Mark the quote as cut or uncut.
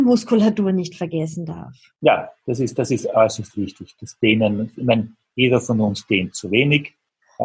uncut